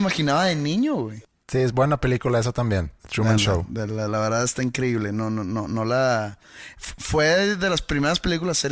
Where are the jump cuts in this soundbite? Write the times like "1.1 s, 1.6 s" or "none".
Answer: 3.0 s